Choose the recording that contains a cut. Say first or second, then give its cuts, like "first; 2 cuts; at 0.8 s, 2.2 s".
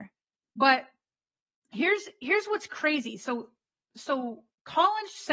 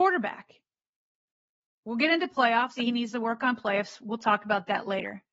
second; 1 cut; at 2.8 s